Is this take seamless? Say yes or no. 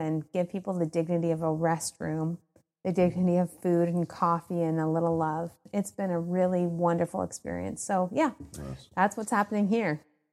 yes